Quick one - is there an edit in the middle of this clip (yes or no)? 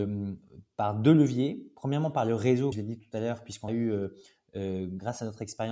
yes